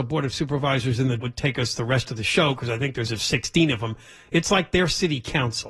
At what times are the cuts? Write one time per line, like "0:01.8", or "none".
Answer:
0:01.2
0:03.1